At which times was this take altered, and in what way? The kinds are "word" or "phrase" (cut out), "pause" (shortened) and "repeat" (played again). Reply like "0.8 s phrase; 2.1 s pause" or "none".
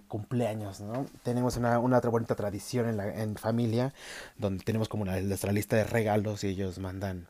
none